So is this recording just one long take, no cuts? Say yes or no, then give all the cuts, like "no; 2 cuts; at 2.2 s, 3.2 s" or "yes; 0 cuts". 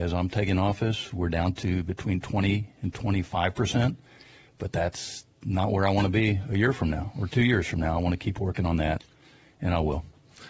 yes; 0 cuts